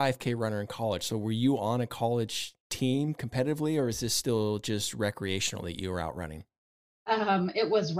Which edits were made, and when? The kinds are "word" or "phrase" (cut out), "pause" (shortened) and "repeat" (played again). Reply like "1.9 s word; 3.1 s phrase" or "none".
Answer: none

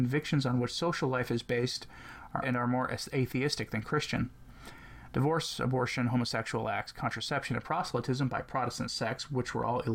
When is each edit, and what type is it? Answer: 2.4 s word

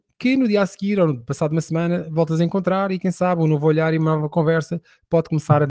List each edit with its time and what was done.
none

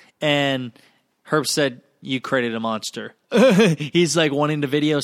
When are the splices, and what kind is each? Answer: none

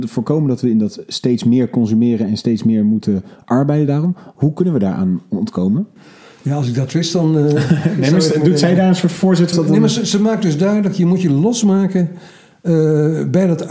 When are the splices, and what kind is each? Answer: 9.5 s word

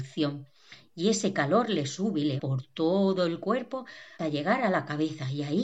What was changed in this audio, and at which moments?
2.4 s word; 4.2 s word

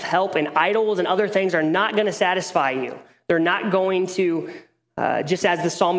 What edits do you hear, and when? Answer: none

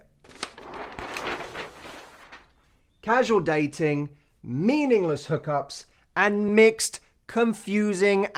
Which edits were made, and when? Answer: none

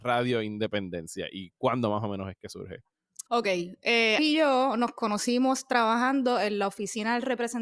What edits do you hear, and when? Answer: 3.3 s pause; 4.2 s word

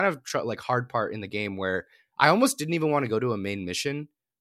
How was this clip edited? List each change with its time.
none

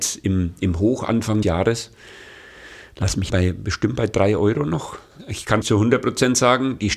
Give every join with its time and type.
1.4 s word; 3.3 s word; 5.6 s phrase

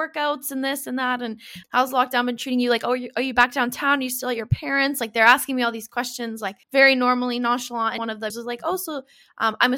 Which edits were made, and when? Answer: 1.6 s word; 6.6 s pause; 8.0 s word; 8.3 s word

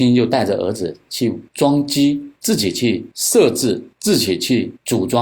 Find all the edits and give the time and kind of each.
1.5 s pause; 2.4 s pause

